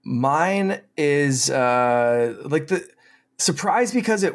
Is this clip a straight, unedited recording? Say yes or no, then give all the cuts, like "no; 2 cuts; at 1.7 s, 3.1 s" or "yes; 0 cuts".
yes; 0 cuts